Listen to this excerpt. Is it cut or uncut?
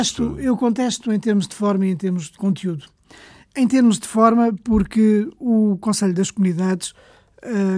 uncut